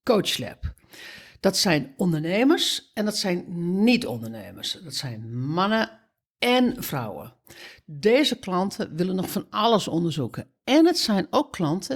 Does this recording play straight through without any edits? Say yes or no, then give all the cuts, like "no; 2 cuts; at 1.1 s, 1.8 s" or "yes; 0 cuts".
yes; 0 cuts